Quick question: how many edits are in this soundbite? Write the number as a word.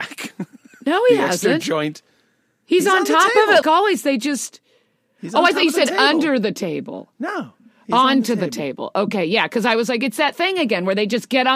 one